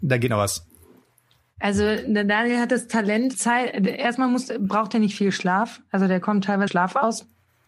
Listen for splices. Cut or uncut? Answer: cut